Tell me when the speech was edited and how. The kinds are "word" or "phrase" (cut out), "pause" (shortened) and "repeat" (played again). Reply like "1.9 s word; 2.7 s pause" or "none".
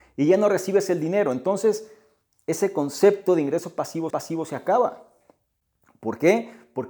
4.1 s repeat